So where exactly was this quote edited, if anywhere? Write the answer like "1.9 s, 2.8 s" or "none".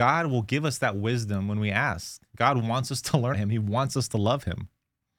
3.3 s